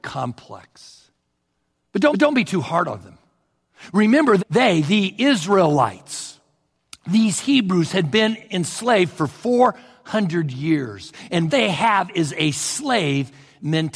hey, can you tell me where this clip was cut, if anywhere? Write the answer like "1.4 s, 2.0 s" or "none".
2.1 s, 4.4 s, 11.5 s